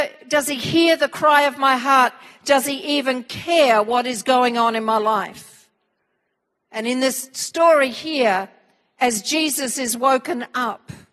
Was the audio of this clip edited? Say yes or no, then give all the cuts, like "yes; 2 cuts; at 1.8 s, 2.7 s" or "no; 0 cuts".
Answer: no; 0 cuts